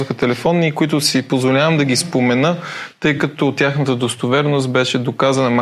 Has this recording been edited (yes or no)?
no